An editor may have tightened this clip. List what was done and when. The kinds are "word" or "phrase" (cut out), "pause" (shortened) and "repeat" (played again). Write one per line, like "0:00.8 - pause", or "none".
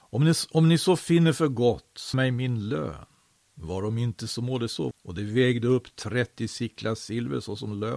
0:02.1 - word
0:04.9 - word